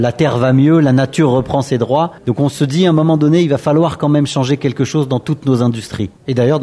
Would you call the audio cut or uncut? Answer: cut